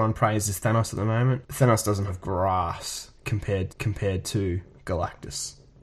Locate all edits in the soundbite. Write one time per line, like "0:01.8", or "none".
0:02.1
0:03.7